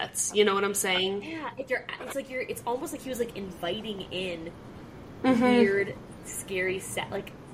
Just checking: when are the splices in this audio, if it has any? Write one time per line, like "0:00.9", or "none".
0:01.7